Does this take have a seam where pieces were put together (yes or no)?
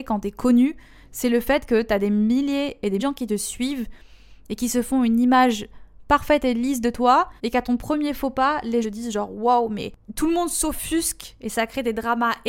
yes